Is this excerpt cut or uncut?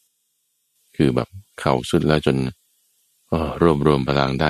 uncut